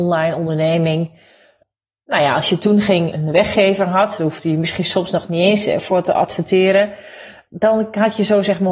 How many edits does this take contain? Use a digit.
0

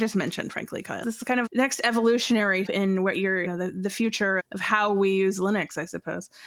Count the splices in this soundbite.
5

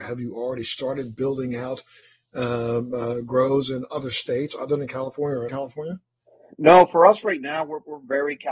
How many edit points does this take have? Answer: 1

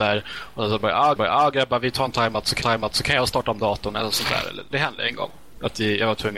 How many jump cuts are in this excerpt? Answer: 3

